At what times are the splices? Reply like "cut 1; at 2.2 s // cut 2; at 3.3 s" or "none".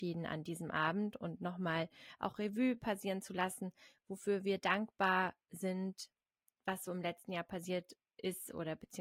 none